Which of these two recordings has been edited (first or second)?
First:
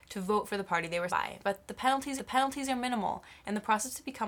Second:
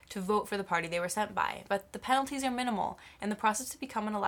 first